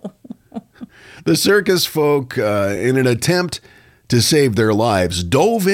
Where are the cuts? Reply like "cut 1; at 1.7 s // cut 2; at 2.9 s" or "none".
none